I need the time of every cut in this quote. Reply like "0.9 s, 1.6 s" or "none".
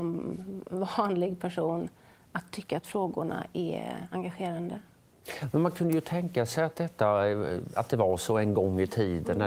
none